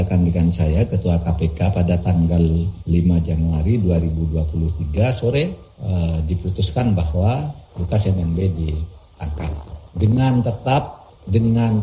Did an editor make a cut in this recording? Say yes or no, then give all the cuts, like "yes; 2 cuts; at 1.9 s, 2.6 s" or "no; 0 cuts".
yes; 1 cut; at 7.7 s